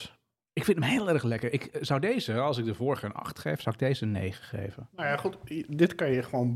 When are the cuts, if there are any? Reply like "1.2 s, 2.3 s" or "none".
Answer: none